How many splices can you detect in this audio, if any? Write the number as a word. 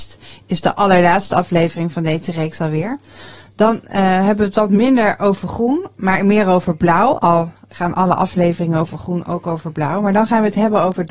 zero